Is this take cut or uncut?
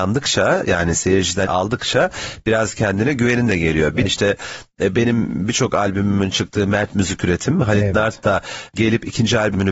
cut